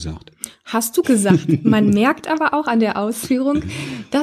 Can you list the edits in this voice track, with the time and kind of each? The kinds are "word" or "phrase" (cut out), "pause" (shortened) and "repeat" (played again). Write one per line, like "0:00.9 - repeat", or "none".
0:01.0 - word